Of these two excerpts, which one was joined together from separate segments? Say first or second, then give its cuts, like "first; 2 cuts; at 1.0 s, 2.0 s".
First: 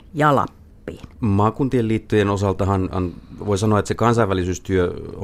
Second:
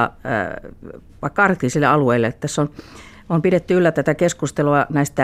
first; 1 cut; at 1.1 s